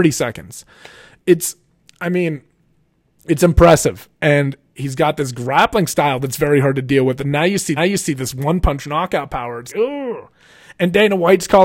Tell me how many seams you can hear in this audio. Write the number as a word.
three